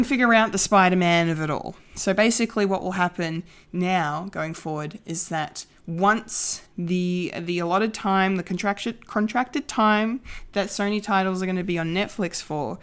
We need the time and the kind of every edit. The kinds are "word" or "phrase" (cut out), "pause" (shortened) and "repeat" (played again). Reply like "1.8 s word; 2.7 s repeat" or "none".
6.7 s pause